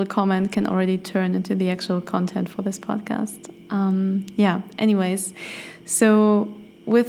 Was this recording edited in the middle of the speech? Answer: no; 0 cuts

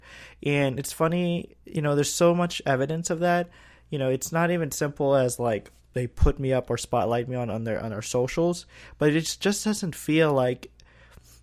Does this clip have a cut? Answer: no; 0 cuts

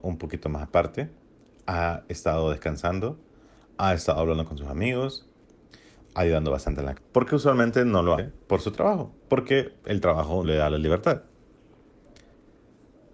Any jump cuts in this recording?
yes; 4 cuts; at 6.9 s, 8.2 s, 9.2 s, 10.4 s

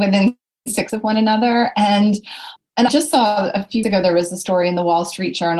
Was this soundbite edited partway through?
yes; 3 cuts; at 0.9 s, 2.9 s, 3.8 s

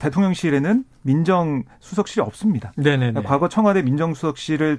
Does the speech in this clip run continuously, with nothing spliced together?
yes; 0 cuts

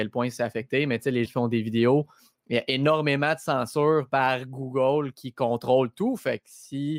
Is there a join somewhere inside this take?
yes; 1 cut; at 1.3 s

